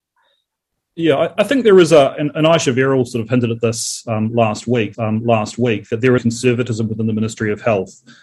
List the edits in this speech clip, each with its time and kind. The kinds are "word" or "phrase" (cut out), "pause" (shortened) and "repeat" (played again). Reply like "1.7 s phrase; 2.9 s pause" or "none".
1.4 s word; 4.9 s repeat; 6.2 s phrase